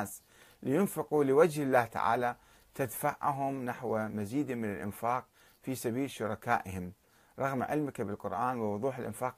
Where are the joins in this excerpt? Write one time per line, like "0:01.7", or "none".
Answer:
none